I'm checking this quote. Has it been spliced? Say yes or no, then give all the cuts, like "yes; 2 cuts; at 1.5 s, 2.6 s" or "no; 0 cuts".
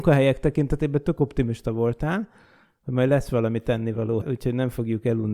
yes; 1 cut; at 4.2 s